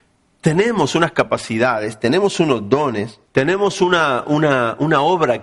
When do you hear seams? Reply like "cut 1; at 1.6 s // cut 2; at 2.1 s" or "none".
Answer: cut 1; at 3.2 s

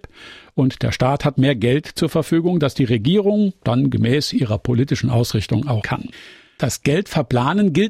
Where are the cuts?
cut 1; at 5.8 s

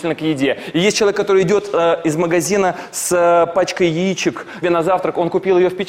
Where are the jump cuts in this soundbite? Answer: cut 1; at 4.6 s

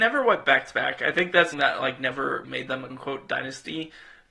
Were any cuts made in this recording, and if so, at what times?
cut 1; at 1.5 s // cut 2; at 2.4 s // cut 3; at 2.9 s

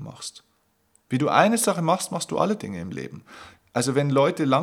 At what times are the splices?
none

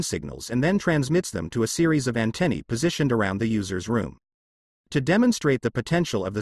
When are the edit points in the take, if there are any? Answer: none

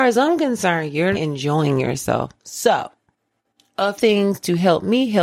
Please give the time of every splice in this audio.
cut 1; at 1.1 s // cut 2; at 2.4 s // cut 3; at 4.0 s

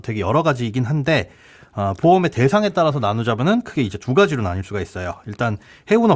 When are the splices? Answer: none

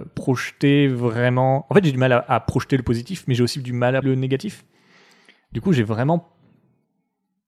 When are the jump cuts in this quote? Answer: cut 1; at 4.0 s

